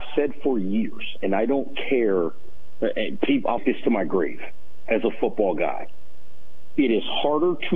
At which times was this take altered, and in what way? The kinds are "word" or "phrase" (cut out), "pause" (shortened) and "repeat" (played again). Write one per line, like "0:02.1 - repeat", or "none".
0:03.6 - word